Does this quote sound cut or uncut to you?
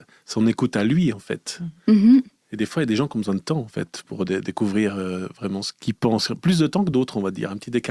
uncut